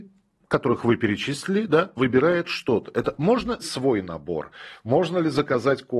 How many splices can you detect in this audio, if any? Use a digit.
2